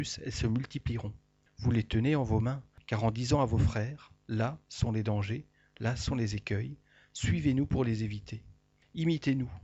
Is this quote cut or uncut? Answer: uncut